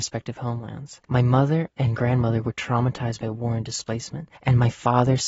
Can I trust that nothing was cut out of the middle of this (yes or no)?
no